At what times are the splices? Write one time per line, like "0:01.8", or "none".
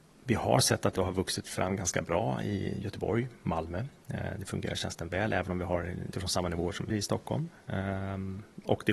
0:01.0
0:06.1
0:06.9

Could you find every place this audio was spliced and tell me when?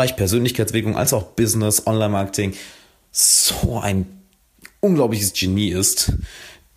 none

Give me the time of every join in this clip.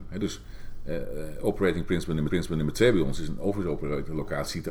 0:02.3

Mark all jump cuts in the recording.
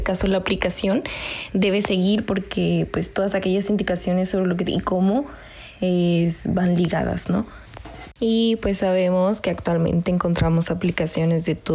0:04.7

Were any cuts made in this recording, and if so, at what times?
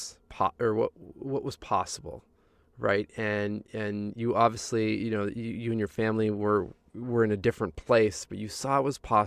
none

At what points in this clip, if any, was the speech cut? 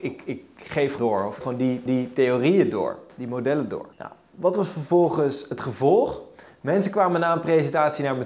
0:01.0
0:01.4
0:01.9
0:03.9

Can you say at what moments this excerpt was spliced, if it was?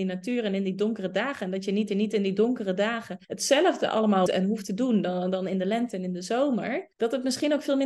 0:01.9
0:03.2
0:04.3
0:06.9

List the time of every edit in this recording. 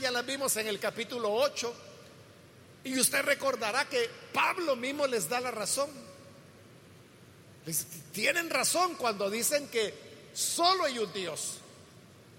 0:02.7

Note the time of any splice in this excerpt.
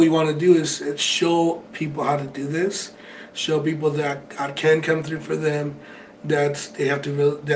none

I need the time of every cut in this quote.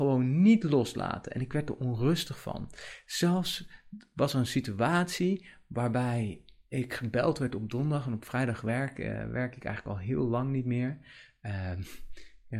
none

